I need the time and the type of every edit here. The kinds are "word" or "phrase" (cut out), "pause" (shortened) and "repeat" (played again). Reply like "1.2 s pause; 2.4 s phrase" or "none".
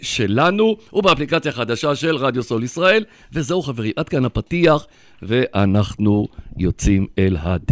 none